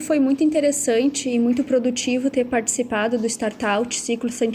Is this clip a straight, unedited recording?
yes; 0 cuts

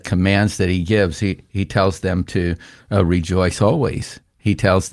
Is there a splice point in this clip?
no; 0 cuts

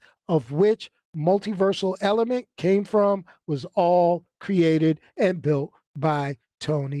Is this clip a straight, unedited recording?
yes; 0 cuts

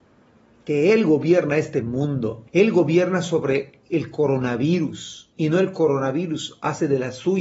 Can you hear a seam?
yes; 2 cuts; at 2.5 s, 5.3 s

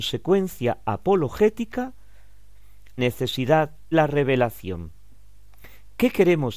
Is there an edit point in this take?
yes; 2 cuts; at 3.0 s, 3.9 s

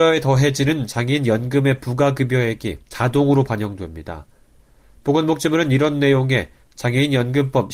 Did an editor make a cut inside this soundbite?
yes; 1 cut; at 2.8 s

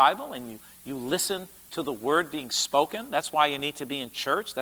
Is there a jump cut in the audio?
no; 0 cuts

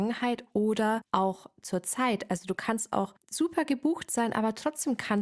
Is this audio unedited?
yes; 0 cuts

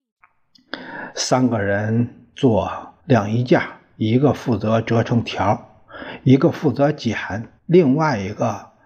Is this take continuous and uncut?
no; 2 cuts; at 3.0 s, 7.6 s

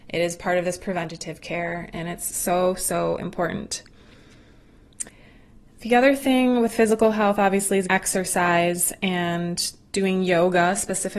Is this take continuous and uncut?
no; 1 cut; at 7.9 s

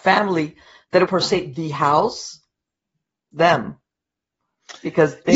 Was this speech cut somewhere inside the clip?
yes; 2 cuts; at 1.1 s, 3.3 s

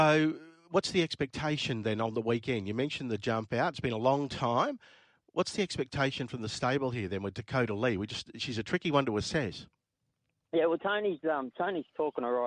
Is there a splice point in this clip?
no; 0 cuts

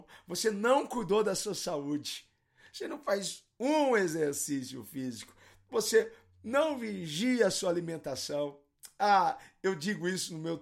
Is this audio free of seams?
yes; 0 cuts

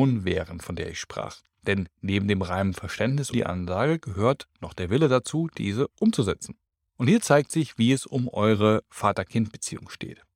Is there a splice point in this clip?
yes; 2 cuts; at 3.3 s, 6.7 s

